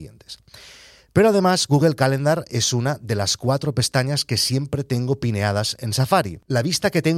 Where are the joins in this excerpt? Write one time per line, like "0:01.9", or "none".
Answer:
none